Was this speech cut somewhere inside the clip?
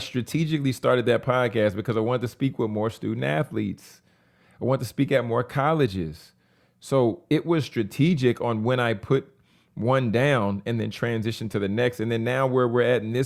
no; 0 cuts

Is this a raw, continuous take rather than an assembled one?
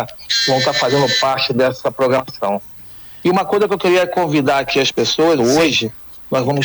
no; 1 cut; at 5.4 s

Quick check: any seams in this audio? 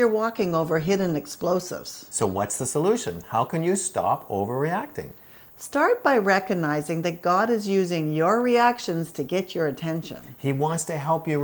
no; 0 cuts

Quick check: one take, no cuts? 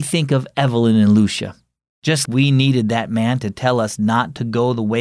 no; 1 cut; at 2.2 s

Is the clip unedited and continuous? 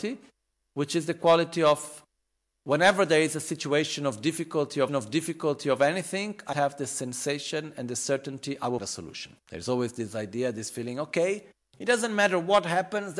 no; 4 cuts; at 4.9 s, 6.5 s, 8.8 s, 9.4 s

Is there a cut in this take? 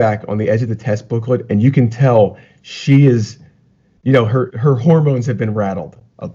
yes; 1 cut; at 4.5 s

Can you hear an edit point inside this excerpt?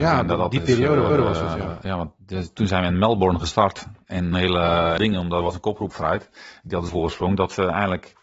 yes; 5 cuts; at 1.1 s, 4.3 s, 5.0 s, 5.9 s, 6.9 s

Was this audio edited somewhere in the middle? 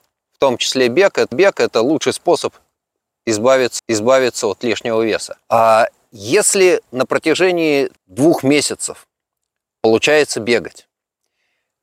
yes; 4 cuts; at 1.3 s, 3.8 s, 5.4 s, 8.0 s

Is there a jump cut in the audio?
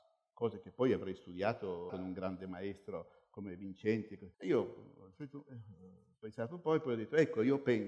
yes; 2 cuts; at 1.9 s, 4.3 s

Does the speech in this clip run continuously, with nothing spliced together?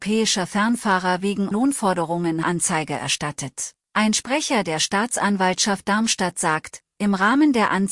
no; 3 cuts; at 1.5 s, 2.4 s, 3.8 s

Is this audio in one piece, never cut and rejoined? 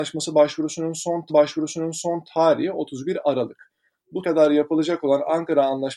no; 2 cuts; at 1.3 s, 4.2 s

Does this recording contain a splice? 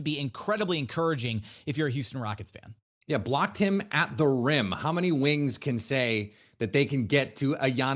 no; 0 cuts

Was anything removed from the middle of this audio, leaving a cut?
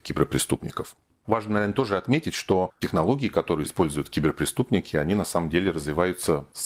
no; 0 cuts

